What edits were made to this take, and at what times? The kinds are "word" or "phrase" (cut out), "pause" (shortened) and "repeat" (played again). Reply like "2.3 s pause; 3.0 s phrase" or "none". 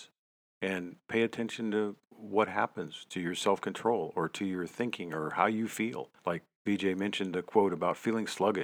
2.0 s pause; 6.2 s pause